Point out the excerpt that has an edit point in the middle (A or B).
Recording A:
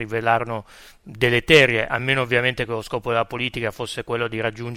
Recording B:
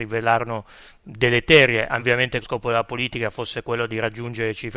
B